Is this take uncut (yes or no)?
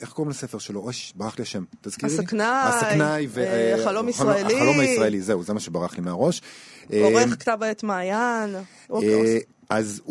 yes